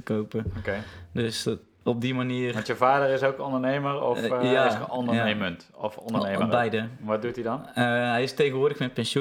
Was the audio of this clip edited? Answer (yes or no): no